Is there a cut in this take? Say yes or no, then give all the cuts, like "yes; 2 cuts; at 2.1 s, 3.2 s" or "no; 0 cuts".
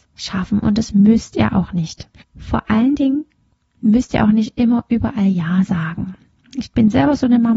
yes; 1 cut; at 2.2 s